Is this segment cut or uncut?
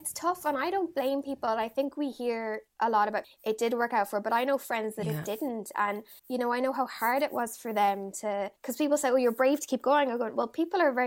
cut